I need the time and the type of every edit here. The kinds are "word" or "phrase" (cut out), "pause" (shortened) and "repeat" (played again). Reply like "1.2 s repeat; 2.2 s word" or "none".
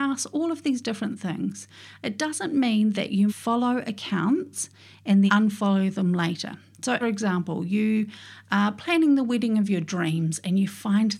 3.3 s word; 5.3 s word; 7.0 s word